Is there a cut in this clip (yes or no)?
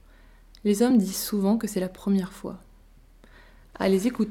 no